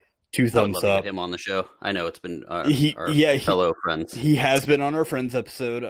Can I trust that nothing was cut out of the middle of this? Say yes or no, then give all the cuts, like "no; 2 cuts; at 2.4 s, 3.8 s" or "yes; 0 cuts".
yes; 0 cuts